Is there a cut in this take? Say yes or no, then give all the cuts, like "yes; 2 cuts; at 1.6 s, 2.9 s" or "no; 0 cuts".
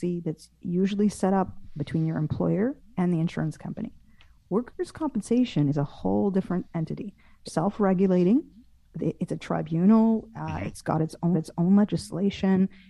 yes; 2 cuts; at 7.5 s, 11.3 s